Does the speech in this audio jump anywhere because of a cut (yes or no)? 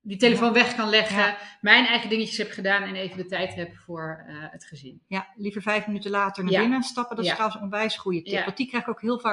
no